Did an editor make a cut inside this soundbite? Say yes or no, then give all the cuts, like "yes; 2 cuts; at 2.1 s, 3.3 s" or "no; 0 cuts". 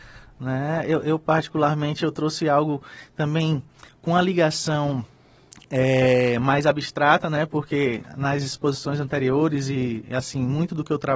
no; 0 cuts